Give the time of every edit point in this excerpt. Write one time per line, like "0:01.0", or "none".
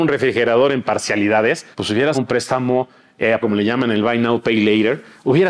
0:01.7
0:02.1
0:03.4